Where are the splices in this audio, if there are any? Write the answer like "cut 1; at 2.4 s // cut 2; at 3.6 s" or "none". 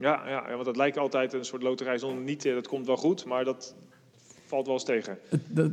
none